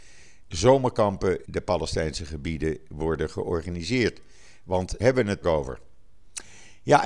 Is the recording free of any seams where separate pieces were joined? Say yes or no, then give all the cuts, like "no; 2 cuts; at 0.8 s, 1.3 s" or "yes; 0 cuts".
no; 3 cuts; at 1.4 s, 5.0 s, 5.4 s